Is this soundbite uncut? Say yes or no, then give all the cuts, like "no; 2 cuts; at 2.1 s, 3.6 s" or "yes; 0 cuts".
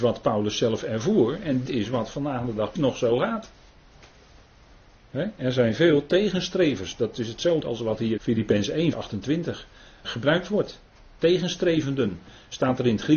no; 6 cuts; at 1.7 s, 2.8 s, 7.6 s, 8.2 s, 8.9 s, 10.0 s